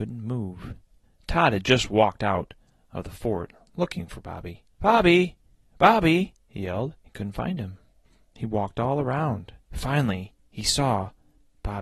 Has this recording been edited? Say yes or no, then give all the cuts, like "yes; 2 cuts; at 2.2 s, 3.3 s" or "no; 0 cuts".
yes; 4 cuts; at 4.7 s, 6.4 s, 7.0 s, 9.6 s